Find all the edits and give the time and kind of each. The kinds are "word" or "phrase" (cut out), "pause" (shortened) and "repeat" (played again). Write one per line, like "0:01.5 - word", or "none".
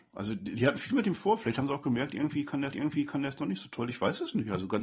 0:02.7 - repeat